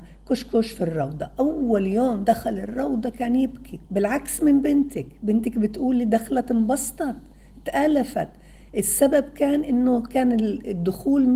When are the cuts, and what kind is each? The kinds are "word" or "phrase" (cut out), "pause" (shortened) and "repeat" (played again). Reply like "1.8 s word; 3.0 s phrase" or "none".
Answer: 3.9 s pause